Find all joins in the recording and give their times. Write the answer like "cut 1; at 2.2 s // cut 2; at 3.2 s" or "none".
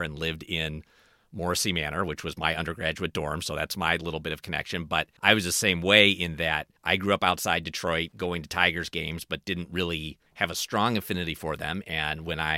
cut 1; at 5.2 s // cut 2; at 6.8 s // cut 3; at 10.3 s